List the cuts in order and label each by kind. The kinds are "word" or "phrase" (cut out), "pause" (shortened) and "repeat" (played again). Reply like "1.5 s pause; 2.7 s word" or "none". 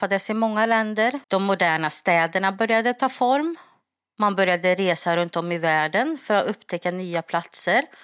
1.2 s pause